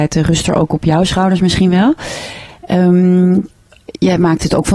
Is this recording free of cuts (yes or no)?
yes